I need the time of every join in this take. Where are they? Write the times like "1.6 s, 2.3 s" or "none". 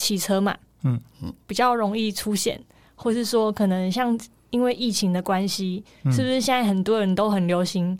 none